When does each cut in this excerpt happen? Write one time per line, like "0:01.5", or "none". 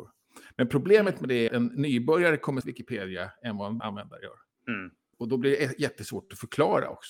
0:01.5
0:02.6
0:03.8
0:04.5